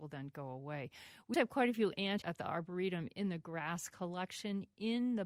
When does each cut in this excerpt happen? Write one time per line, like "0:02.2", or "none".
0:01.3
0:02.2